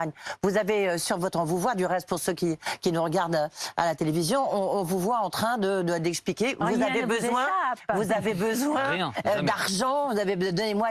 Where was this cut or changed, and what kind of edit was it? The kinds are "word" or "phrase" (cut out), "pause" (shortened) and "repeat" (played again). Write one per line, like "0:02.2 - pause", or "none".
none